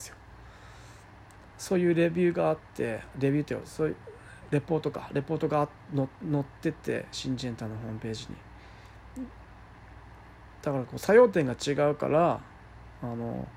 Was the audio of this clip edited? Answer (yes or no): no